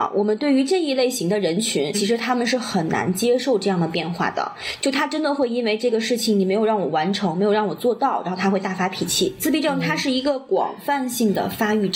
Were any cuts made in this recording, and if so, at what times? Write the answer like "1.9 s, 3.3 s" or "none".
1.9 s